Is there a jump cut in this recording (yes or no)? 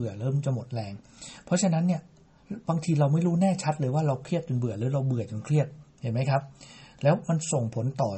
yes